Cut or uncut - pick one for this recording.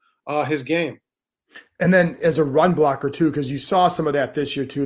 uncut